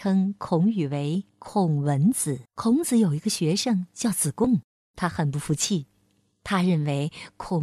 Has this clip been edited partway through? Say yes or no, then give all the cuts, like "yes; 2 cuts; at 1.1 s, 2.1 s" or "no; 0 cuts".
yes; 3 cuts; at 1.3 s, 2.4 s, 4.7 s